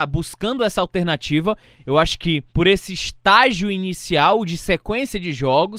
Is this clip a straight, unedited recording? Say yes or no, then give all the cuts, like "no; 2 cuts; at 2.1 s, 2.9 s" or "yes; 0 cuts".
no; 1 cut; at 2.5 s